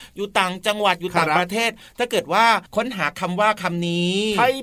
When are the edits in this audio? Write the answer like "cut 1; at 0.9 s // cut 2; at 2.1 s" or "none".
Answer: cut 1; at 2.7 s